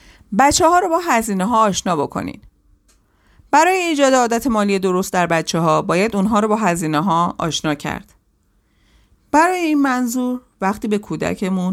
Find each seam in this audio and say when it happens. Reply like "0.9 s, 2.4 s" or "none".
none